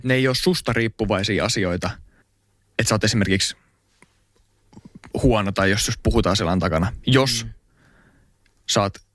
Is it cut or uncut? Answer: cut